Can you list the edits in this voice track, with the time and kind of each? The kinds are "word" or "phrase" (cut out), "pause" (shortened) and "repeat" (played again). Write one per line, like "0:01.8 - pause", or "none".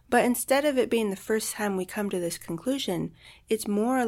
none